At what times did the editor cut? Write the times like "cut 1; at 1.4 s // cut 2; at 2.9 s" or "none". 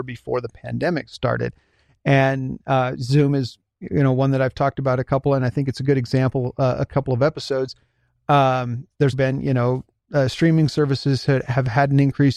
cut 1; at 9.1 s